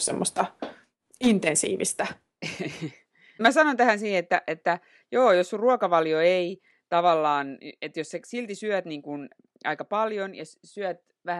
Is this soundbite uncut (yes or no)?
yes